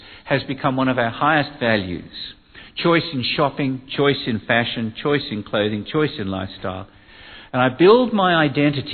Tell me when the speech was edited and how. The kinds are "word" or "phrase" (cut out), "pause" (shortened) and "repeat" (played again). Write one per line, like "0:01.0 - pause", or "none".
none